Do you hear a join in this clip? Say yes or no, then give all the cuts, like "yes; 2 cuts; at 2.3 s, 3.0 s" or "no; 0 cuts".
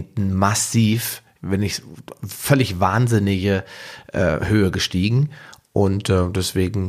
no; 0 cuts